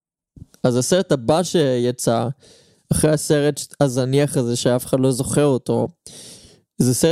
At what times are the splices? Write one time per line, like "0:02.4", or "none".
none